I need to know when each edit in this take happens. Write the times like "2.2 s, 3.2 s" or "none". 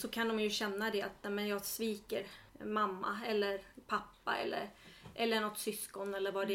2.5 s